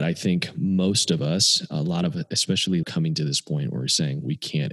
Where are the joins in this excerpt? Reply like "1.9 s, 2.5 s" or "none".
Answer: 2.8 s